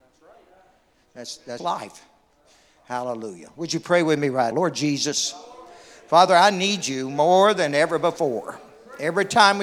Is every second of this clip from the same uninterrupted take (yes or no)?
no